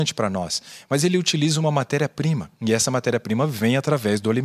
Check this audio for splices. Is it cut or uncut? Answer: cut